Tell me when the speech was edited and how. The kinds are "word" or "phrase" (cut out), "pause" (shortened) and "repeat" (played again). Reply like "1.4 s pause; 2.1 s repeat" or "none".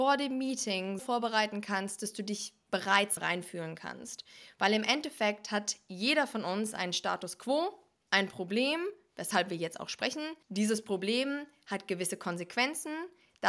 1.0 s word; 3.2 s phrase; 10.4 s pause

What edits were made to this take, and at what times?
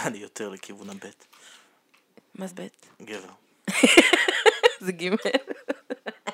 2.5 s word

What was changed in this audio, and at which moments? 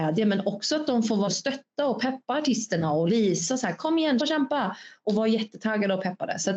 1.3 s word; 3.1 s word; 4.2 s word

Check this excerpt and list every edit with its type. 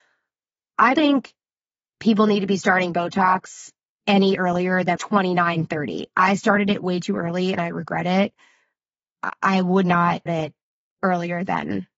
0.9 s word; 3.9 s pause; 5.0 s word; 10.3 s word

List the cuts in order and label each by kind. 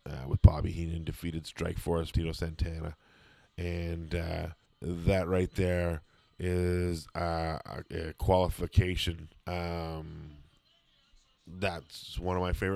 2.1 s phrase; 4.7 s pause; 7.9 s pause; 9.4 s pause

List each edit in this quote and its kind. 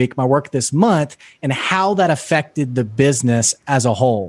none

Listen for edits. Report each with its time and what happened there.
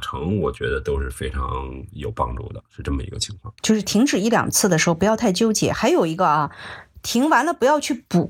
3.6 s pause

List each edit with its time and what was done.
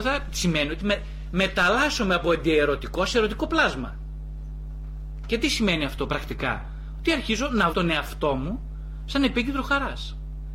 7.7 s word

